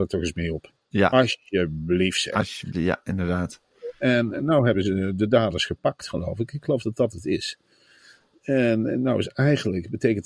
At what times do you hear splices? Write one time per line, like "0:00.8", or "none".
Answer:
none

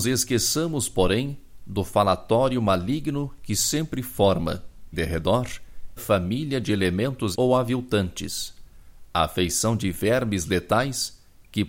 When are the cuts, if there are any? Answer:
0:04.9
0:06.0
0:07.3

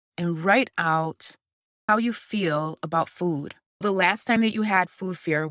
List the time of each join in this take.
none

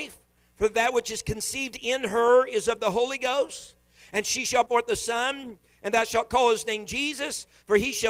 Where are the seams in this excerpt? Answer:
0:04.7

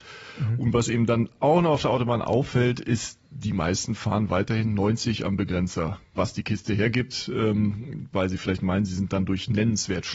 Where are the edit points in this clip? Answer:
0:06.2

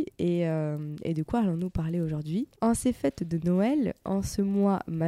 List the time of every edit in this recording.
0:02.6

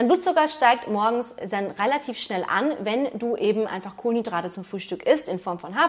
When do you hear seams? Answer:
none

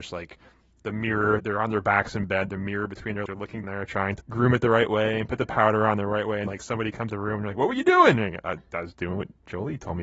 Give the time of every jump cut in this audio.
0:01.4
0:03.3
0:03.6
0:04.2
0:06.5
0:07.1
0:08.9

